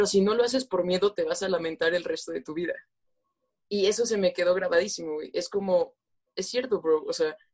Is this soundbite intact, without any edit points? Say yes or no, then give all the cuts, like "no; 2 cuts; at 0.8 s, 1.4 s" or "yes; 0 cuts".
yes; 0 cuts